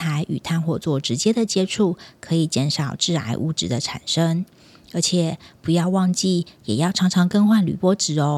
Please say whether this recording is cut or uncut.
uncut